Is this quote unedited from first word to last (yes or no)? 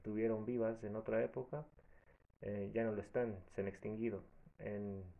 yes